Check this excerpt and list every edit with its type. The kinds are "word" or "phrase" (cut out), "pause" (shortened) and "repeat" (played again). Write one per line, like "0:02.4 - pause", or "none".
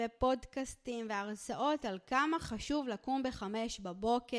none